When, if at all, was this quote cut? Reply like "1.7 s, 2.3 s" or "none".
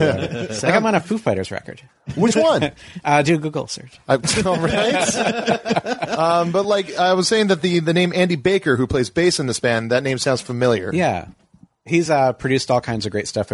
none